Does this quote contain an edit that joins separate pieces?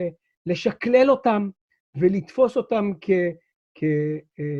no; 0 cuts

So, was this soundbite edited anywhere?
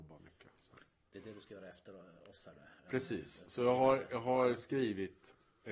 yes; 1 cut; at 2.8 s

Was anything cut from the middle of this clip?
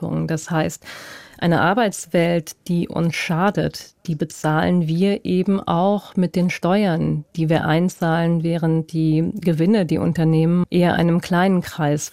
yes; 1 cut; at 10.6 s

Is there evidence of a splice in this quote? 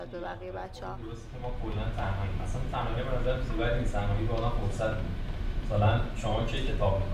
no; 0 cuts

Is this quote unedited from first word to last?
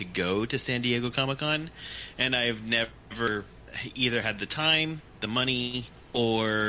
yes; 0 cuts

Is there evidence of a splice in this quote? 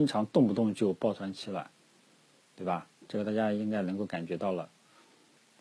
no; 0 cuts

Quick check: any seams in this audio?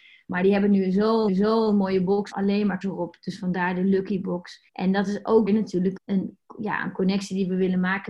yes; 6 cuts; at 1.3 s, 2.3 s, 2.8 s, 4.7 s, 5.5 s, 6.0 s

